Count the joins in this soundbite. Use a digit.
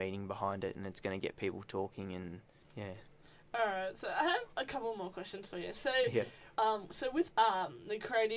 0